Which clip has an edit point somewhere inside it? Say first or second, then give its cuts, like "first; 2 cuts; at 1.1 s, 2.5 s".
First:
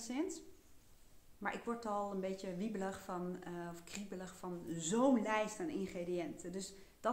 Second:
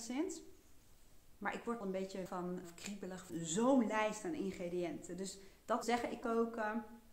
second; 6 cuts; at 1.8 s, 2.3 s, 2.6 s, 3.3 s, 5.8 s, 6.2 s